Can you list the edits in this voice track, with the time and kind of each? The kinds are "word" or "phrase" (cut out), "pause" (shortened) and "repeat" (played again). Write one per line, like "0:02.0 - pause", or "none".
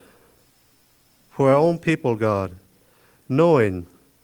none